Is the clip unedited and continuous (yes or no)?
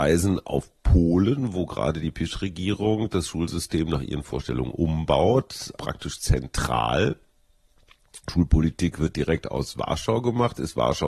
no